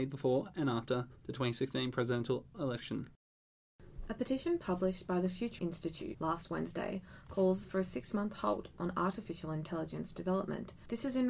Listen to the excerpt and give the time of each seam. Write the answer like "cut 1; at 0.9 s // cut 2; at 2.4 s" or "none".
cut 1; at 5.6 s